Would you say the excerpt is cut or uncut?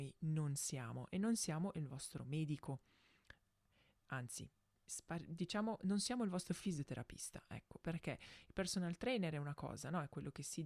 uncut